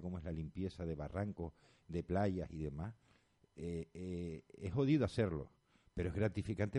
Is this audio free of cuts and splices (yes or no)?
yes